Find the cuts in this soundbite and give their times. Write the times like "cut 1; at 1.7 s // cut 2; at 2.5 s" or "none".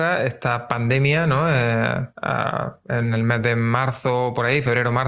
cut 1; at 2.1 s